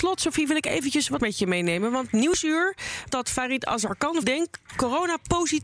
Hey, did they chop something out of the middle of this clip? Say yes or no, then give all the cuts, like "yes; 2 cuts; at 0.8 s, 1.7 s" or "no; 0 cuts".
yes; 3 cuts; at 1.2 s, 3.1 s, 4.2 s